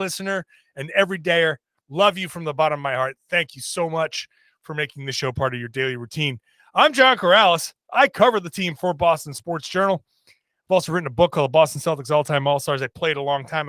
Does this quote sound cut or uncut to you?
uncut